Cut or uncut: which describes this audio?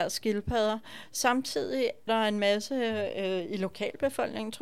cut